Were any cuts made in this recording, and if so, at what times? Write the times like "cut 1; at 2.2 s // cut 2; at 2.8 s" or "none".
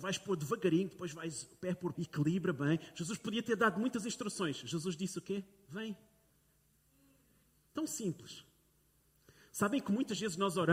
cut 1; at 1.9 s